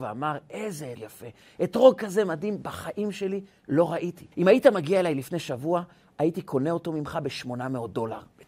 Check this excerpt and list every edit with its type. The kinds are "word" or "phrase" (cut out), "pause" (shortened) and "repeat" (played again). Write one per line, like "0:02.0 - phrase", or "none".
0:00.9 - word
0:04.3 - pause